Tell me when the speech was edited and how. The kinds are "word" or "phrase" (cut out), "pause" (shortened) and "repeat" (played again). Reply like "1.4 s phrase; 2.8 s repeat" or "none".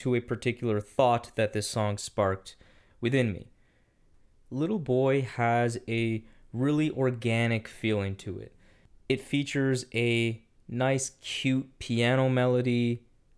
none